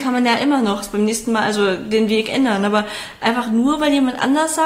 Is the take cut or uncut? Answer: uncut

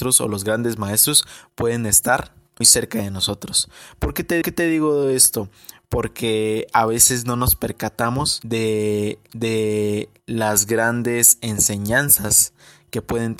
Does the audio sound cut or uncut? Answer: cut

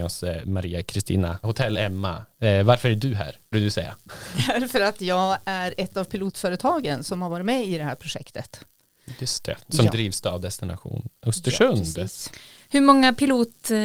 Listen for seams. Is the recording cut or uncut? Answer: cut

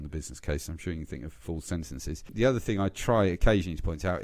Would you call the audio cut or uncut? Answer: uncut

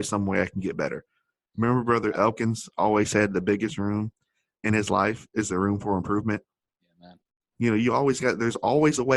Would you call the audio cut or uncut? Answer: uncut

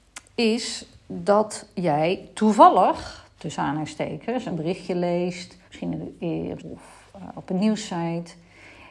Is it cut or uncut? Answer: cut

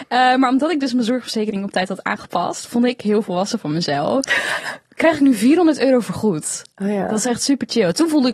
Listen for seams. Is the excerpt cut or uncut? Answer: uncut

